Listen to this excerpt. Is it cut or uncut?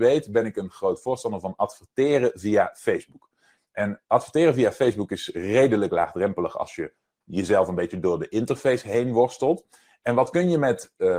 uncut